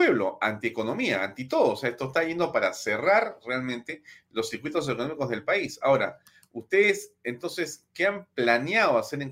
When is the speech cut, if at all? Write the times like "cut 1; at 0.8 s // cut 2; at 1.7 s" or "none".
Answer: none